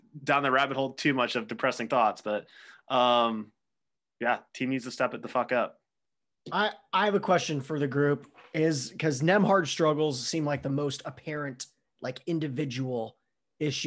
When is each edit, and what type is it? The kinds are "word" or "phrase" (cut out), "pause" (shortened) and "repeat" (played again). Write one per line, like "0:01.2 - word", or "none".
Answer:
none